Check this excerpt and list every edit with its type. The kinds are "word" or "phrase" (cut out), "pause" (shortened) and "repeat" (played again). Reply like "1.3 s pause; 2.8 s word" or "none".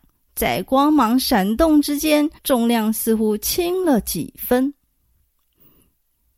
2.4 s pause